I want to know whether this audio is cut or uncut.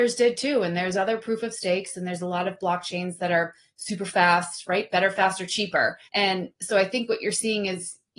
cut